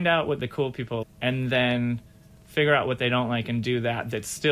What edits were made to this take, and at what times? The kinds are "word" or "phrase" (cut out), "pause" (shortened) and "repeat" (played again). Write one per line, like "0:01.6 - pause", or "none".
0:01.0 - word